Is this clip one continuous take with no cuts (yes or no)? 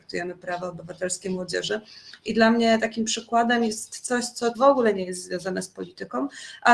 no